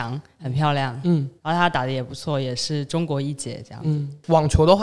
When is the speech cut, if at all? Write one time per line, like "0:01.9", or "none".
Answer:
0:01.4